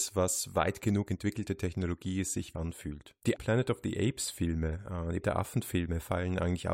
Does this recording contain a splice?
yes; 3 cuts; at 2.5 s, 3.4 s, 5.2 s

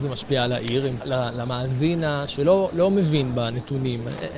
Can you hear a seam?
yes; 1 cut; at 1.0 s

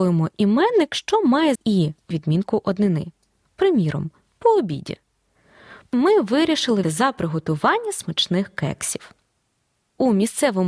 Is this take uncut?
no; 4 cuts; at 1.6 s, 2.1 s, 5.9 s, 6.8 s

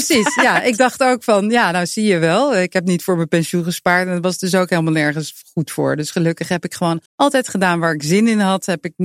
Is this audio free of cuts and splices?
no; 1 cut; at 7.1 s

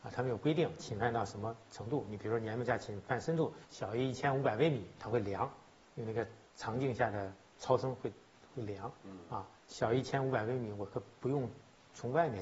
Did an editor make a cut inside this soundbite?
yes; 2 cuts; at 3.6 s, 9.6 s

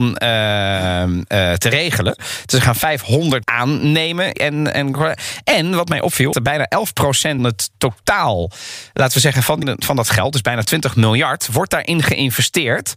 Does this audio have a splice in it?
yes; 5 cuts; at 3.4 s, 4.3 s, 6.3 s, 7.4 s, 9.6 s

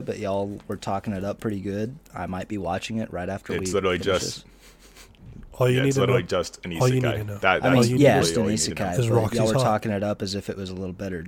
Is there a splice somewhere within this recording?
yes; 1 cut; at 8.2 s

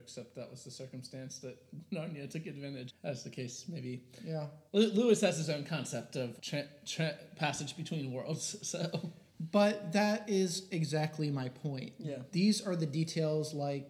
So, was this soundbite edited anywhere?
yes; 4 cuts; at 2.9 s, 4.7 s, 6.4 s, 9.3 s

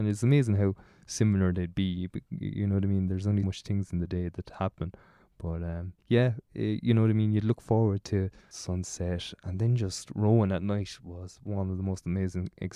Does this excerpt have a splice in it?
yes; 3 cuts; at 3.4 s, 6.0 s, 8.5 s

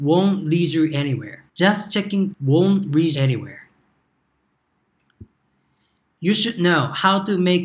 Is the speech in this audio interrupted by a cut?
yes; 3 cuts; at 1.5 s, 2.3 s, 3.1 s

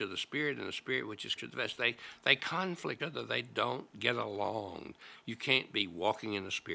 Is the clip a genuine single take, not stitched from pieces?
no; 2 cuts; at 1.4 s, 3.0 s

